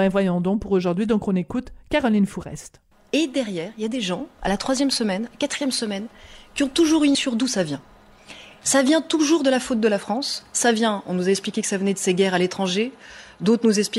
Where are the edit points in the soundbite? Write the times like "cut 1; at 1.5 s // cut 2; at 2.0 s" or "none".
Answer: cut 1; at 2.9 s // cut 2; at 7.1 s